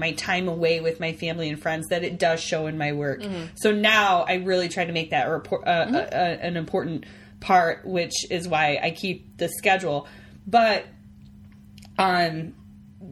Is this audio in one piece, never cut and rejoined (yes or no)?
yes